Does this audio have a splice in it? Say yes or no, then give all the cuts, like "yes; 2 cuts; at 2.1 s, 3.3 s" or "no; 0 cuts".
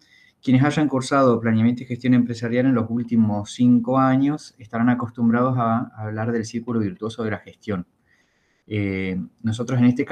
no; 0 cuts